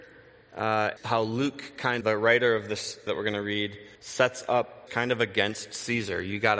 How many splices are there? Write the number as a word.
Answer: five